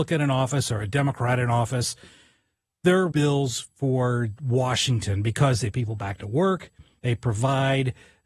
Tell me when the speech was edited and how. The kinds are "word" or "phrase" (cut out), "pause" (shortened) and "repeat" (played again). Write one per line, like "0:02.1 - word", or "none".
0:03.1 - word
0:05.7 - word